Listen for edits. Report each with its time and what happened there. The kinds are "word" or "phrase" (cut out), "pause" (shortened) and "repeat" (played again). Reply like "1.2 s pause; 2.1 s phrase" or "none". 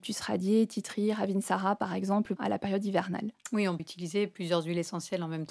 2.4 s phrase; 3.8 s word